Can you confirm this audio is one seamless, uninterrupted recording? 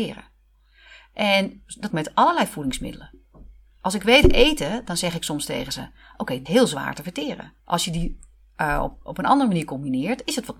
no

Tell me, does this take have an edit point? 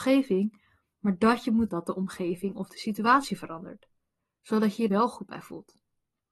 yes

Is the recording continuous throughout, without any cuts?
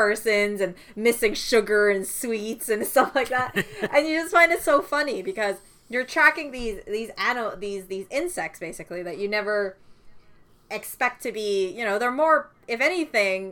yes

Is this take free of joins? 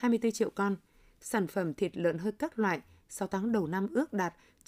yes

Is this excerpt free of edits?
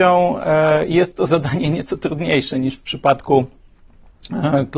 yes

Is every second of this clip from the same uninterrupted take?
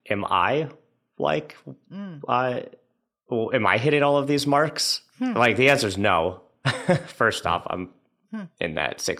yes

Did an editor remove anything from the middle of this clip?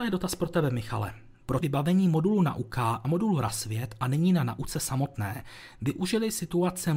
yes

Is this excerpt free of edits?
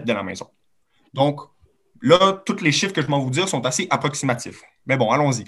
yes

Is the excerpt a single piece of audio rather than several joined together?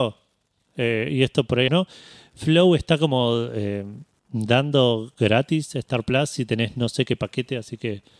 no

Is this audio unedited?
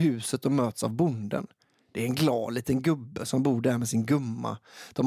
yes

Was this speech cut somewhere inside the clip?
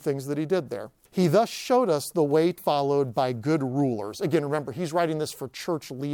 yes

